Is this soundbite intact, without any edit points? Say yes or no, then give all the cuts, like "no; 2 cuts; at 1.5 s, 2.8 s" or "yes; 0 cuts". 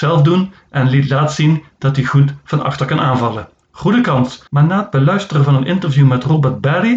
no; 1 cut; at 4.5 s